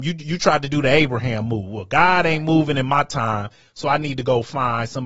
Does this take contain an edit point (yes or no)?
no